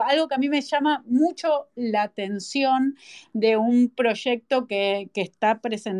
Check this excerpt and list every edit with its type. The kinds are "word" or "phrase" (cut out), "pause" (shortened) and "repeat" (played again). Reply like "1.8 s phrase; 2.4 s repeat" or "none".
none

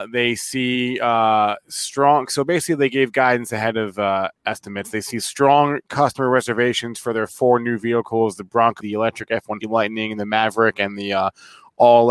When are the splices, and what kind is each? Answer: 4.4 s pause; 8.8 s word; 9.6 s word

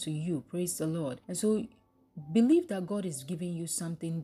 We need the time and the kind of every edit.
1.2 s pause

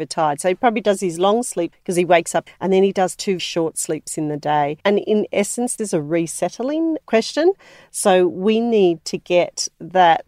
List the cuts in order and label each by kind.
1.7 s word; 2.5 s word; 3.4 s word; 4.8 s pause; 5.8 s word; 7.0 s word

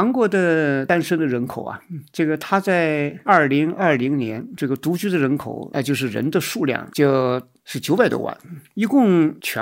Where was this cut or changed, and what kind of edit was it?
7.6 s pause

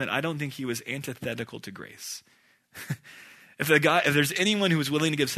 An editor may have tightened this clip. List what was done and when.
none

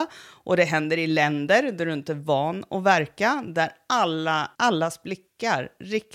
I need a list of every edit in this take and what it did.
4.5 s pause

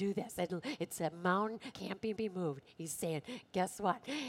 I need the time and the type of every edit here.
1.7 s word; 2.2 s repeat

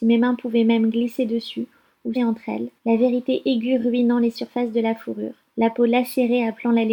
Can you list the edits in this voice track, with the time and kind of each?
2.2 s phrase; 2.8 s pause; 5.5 s pause

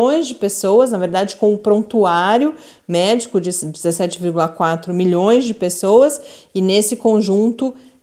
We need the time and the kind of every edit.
none

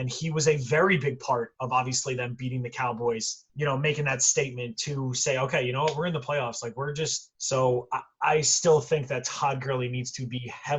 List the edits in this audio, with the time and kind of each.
3.5 s pause; 7.4 s pause

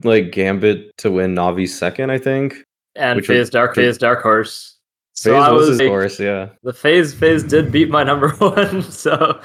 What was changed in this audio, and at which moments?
3.7 s repeat; 5.8 s word; 6.6 s pause

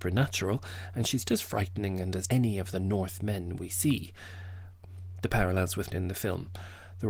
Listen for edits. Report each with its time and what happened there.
1.3 s word; 2.3 s phrase; 5.9 s phrase

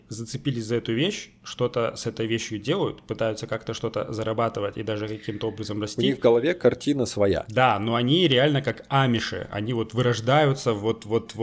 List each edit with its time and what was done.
none

